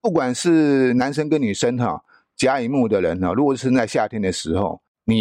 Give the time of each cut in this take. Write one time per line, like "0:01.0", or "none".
none